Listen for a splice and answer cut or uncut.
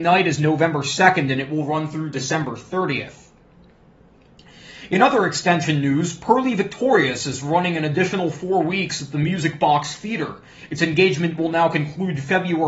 uncut